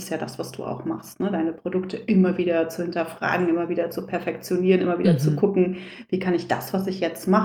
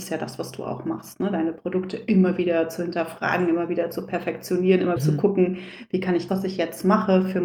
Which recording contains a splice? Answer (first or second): second